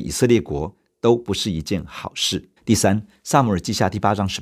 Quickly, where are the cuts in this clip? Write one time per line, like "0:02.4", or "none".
0:02.6